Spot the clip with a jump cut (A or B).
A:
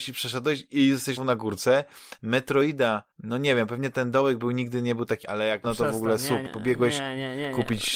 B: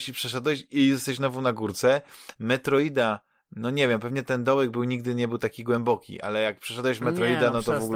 A